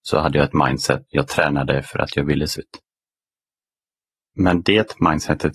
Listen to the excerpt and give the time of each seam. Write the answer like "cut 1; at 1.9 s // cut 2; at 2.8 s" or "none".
cut 1; at 1.1 s // cut 2; at 2.6 s

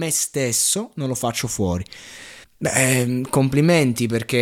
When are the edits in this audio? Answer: cut 1; at 2.4 s

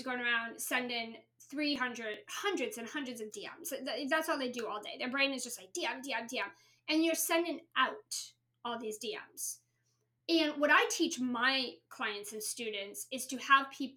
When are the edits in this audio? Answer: none

